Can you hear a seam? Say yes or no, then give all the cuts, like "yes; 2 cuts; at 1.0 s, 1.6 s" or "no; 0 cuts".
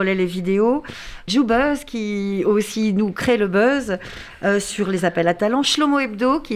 yes; 1 cut; at 1.3 s